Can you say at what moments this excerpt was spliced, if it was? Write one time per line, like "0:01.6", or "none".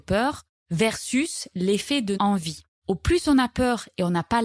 0:02.1